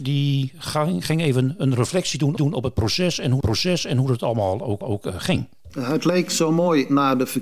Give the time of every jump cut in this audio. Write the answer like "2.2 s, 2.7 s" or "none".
2.4 s, 3.4 s, 4.8 s